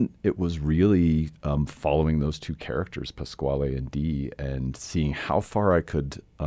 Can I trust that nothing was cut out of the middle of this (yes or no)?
yes